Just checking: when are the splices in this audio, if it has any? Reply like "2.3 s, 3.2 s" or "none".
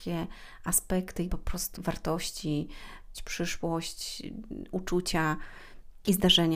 1.3 s, 1.8 s, 3.1 s